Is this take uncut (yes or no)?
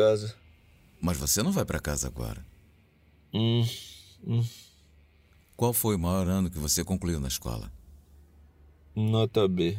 yes